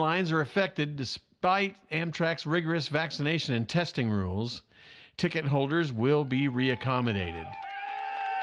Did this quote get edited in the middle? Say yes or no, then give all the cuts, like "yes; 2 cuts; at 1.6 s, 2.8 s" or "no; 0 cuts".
no; 0 cuts